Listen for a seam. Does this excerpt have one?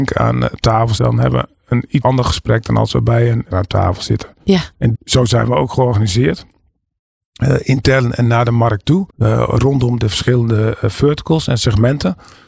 yes; 6 cuts; at 1.0 s, 2.0 s, 3.5 s, 4.9 s, 9.1 s, 10.0 s

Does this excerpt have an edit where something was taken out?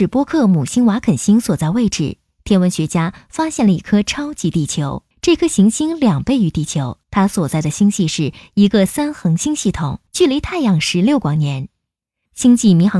yes; 3 cuts; at 5.1 s, 7.0 s, 10.1 s

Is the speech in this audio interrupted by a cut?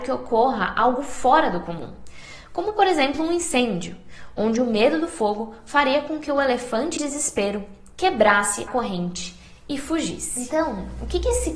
yes; 2 cuts; at 7.0 s, 8.7 s

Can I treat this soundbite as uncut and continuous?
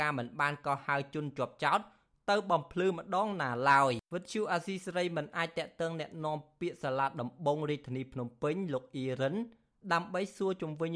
no; 1 cut; at 4.0 s

